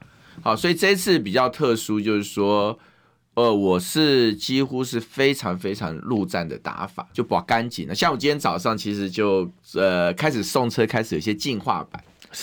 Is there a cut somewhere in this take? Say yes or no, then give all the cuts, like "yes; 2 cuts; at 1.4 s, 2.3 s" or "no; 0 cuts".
yes; 1 cut; at 7.1 s